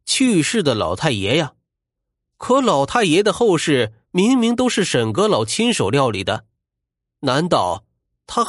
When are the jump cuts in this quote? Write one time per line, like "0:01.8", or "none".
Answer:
none

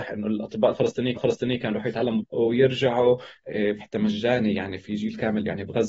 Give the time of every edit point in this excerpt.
0:01.2
0:02.2
0:03.8

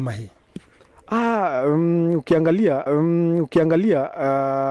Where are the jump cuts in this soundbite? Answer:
0:02.9

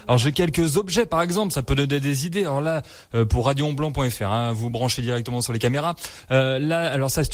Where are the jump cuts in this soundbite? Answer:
none

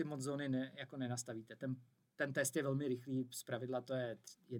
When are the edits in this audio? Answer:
none

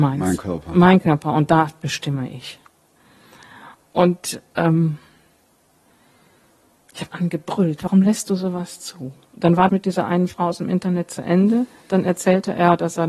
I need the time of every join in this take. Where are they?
0:07.1
0:09.7

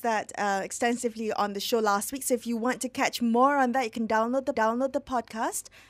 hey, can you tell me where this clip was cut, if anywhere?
0:04.5

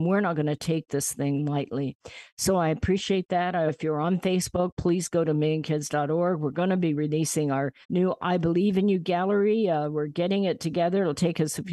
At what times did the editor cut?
0:03.7
0:07.8

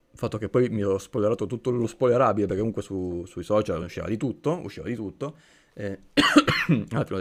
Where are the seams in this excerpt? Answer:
none

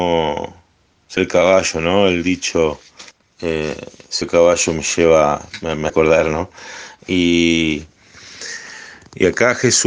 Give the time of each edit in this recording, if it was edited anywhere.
0:01.2
0:03.1
0:04.2
0:05.9

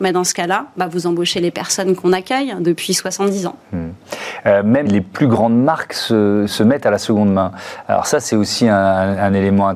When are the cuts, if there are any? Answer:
0:04.9
0:06.5

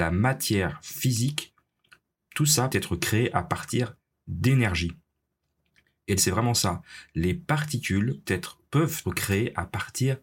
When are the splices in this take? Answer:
0:02.7
0:06.2
0:08.3
0:09.0

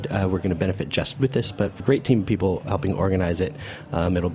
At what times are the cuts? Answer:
0:01.2
0:01.8

